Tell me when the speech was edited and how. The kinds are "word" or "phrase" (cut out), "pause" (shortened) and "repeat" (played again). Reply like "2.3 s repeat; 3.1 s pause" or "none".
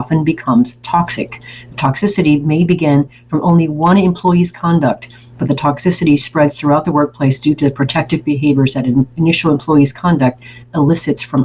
none

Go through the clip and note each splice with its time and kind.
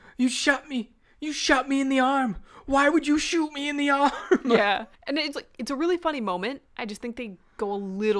5.0 s pause; 5.3 s word

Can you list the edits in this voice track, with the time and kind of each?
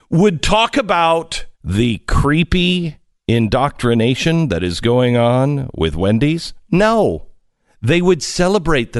1.5 s pause

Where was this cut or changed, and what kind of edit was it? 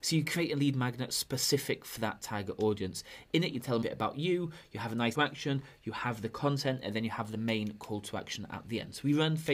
3.8 s phrase; 5.1 s phrase

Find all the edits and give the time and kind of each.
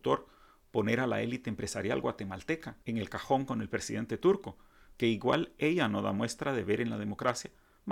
2.8 s pause

